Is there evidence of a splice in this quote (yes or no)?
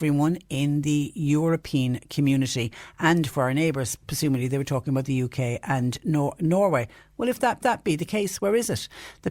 yes